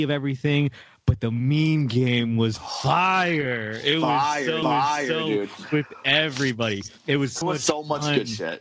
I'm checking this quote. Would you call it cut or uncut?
cut